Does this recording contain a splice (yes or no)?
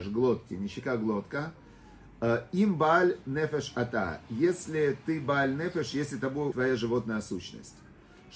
yes